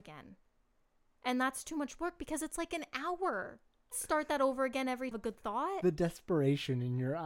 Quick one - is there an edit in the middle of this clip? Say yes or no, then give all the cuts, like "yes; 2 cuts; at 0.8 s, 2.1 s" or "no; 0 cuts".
yes; 2 cuts; at 3.9 s, 5.1 s